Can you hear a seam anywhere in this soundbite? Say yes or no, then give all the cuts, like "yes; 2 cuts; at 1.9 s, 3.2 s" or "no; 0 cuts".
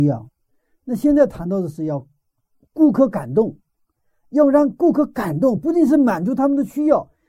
no; 0 cuts